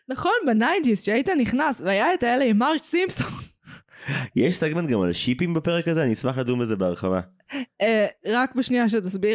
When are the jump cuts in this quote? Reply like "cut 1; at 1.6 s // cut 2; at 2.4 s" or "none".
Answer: none